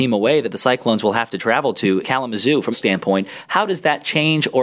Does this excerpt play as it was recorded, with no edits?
no; 2 cuts; at 2.0 s, 2.7 s

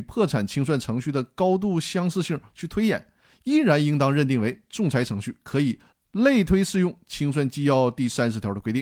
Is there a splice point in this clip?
no; 0 cuts

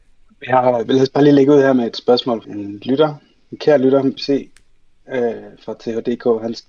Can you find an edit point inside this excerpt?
yes; 2 cuts; at 2.4 s, 4.2 s

